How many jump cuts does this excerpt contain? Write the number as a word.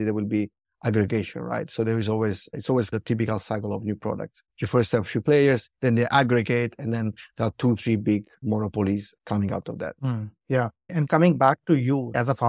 three